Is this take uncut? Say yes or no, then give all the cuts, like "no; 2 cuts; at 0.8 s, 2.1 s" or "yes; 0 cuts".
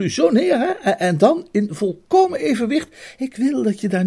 yes; 0 cuts